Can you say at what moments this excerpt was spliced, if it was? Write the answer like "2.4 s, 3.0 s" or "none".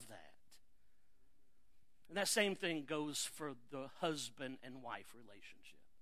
none